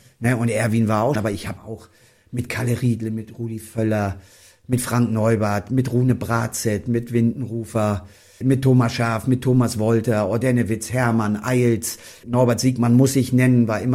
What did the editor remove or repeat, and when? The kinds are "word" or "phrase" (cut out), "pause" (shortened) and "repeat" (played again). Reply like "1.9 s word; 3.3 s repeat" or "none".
1.2 s word; 1.6 s word; 8.4 s word; 12.2 s word